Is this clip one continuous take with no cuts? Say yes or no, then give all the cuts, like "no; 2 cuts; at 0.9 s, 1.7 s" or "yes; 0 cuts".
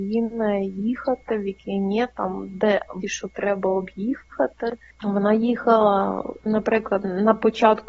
no; 2 cuts; at 3.0 s, 6.5 s